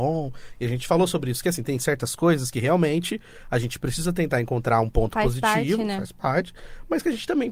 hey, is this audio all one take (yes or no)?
yes